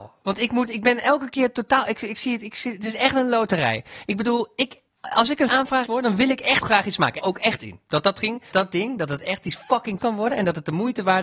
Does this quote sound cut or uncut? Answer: cut